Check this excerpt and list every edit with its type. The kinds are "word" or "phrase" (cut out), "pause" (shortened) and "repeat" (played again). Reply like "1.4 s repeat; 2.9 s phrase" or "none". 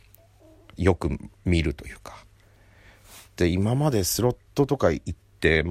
1.3 s pause